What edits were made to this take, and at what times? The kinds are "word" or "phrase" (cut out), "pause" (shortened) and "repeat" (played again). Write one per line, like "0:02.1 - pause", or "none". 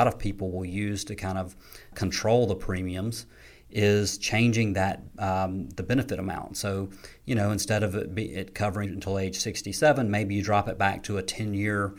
0:01.9 - word
0:08.9 - word